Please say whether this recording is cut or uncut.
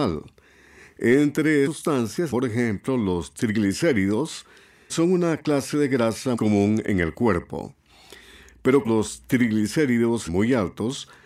cut